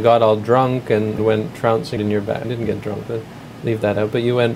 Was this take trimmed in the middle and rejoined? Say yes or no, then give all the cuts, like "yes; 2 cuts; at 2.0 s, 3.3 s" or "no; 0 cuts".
yes; 3 cuts; at 1.2 s, 2.0 s, 2.4 s